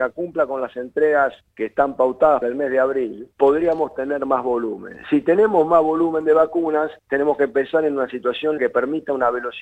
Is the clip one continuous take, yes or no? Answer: no